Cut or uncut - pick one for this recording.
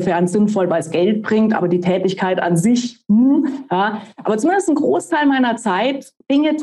uncut